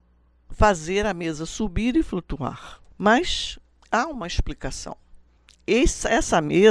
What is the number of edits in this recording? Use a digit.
2